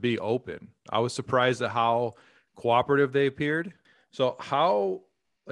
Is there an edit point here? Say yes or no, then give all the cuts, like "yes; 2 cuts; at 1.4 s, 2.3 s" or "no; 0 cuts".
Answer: no; 0 cuts